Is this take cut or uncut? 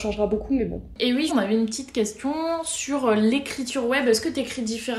cut